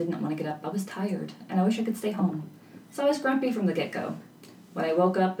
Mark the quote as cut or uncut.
uncut